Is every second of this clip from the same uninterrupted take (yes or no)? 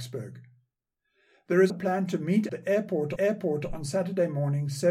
no